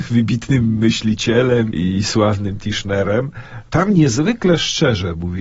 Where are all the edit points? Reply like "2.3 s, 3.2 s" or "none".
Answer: 1.7 s, 3.7 s